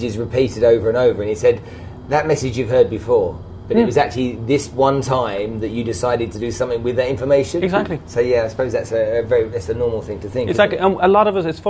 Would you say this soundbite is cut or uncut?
uncut